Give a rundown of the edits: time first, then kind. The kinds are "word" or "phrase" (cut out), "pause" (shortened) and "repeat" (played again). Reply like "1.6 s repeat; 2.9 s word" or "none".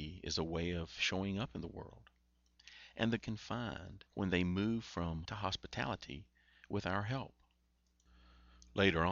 3.2 s phrase; 4.1 s pause; 5.3 s word

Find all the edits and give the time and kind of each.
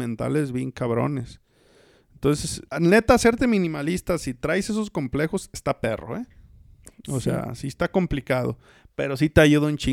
2.7 s pause

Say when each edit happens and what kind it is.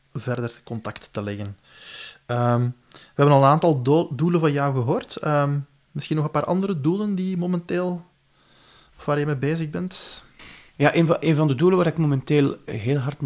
none

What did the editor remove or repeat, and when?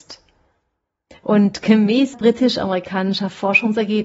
2.1 s word

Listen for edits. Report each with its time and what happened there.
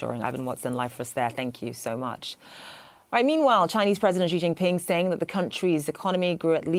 none

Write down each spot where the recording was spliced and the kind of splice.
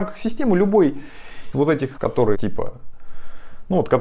1.5 s word; 2.0 s word; 2.3 s word

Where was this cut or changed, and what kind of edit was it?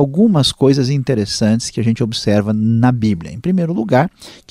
none

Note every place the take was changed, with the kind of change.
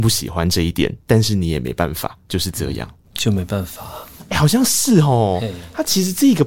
2.2 s pause; 3.0 s pause

